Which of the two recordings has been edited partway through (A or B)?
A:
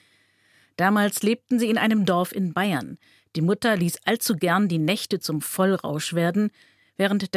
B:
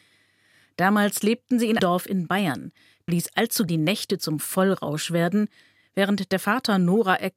B